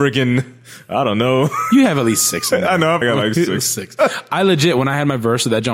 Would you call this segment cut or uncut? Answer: cut